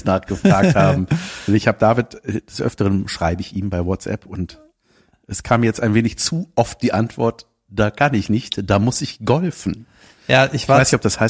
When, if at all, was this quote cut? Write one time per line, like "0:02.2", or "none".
none